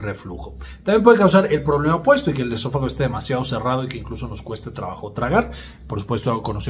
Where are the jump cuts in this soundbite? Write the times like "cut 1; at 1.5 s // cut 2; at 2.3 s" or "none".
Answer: none